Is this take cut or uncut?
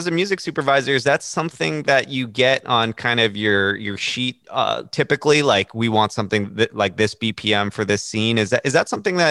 cut